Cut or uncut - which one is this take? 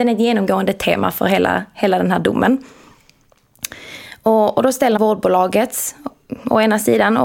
cut